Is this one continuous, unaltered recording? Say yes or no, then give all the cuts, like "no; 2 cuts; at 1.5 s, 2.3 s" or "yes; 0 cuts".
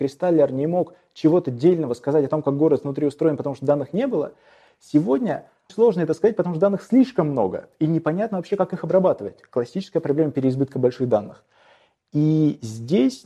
no; 1 cut; at 5.7 s